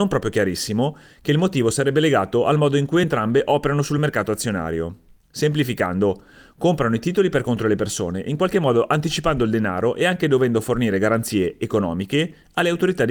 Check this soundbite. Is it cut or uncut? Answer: uncut